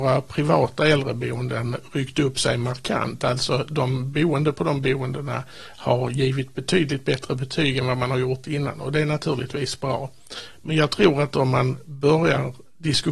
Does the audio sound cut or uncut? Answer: uncut